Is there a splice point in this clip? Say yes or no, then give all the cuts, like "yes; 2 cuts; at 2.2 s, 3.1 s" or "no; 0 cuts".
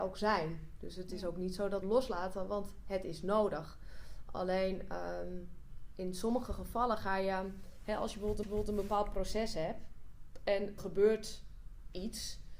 yes; 3 cuts; at 1.8 s, 8.4 s, 10.8 s